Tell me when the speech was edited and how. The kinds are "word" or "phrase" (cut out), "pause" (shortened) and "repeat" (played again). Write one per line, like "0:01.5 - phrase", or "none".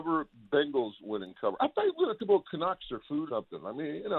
0:02.2 - word
0:03.3 - word